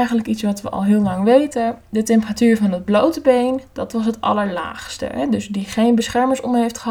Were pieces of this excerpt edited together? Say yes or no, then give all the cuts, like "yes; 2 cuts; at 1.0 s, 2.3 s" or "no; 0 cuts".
no; 0 cuts